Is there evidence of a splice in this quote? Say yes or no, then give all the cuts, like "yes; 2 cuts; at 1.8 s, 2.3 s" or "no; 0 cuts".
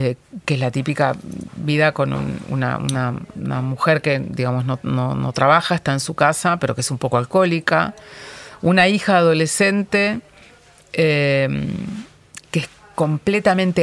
no; 0 cuts